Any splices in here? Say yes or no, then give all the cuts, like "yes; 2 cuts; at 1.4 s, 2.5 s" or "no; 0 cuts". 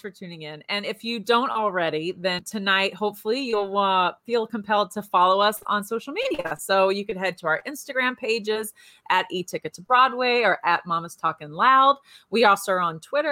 no; 0 cuts